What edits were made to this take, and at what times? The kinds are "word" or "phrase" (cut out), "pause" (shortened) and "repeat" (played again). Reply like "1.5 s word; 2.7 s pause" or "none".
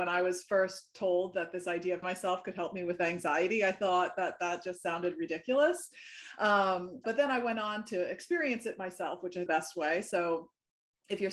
2.0 s phrase; 7.0 s word; 9.5 s phrase